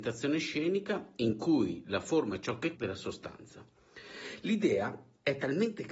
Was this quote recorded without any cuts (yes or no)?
no